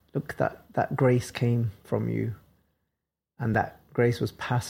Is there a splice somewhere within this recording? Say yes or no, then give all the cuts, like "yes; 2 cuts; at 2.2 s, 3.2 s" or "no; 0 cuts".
no; 0 cuts